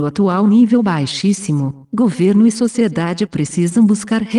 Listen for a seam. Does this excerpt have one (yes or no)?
no